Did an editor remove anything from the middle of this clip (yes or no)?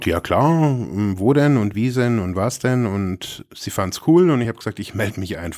no